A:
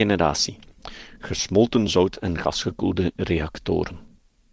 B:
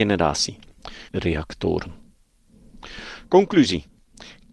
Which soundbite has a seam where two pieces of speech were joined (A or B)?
B